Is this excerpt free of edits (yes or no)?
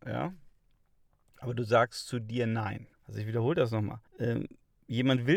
no